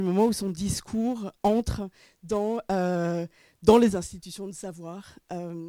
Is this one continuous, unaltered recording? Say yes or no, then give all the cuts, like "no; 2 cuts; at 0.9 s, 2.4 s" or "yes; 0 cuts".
yes; 0 cuts